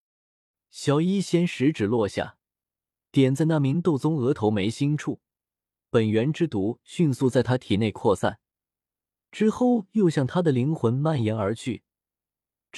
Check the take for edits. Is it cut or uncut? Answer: uncut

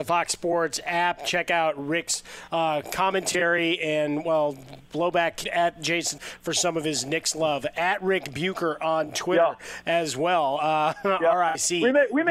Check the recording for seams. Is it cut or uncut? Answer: cut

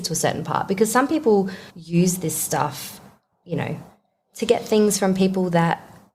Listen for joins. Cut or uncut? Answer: cut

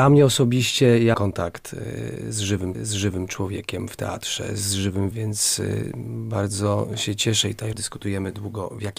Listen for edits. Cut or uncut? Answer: cut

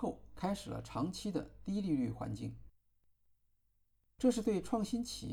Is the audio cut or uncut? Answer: uncut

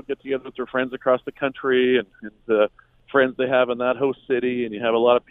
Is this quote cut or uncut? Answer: uncut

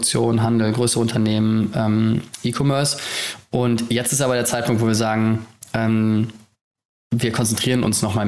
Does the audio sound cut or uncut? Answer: uncut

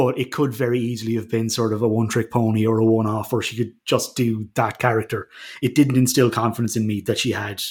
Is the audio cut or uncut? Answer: uncut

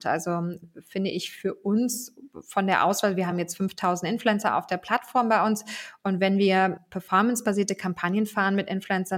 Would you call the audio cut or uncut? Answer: uncut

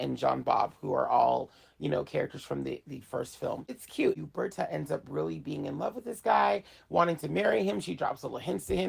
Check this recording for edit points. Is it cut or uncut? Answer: uncut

